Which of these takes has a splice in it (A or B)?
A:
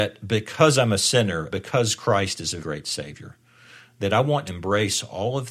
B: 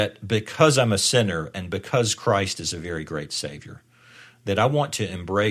A